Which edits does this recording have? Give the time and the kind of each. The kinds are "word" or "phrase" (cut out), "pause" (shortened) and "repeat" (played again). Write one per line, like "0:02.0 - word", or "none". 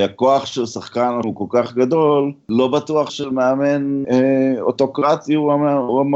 0:01.2 - word
0:03.1 - word
0:04.0 - word